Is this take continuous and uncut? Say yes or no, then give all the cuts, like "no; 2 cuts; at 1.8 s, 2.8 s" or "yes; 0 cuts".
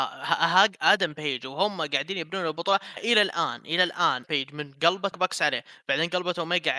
no; 3 cuts; at 3.0 s, 4.2 s, 5.1 s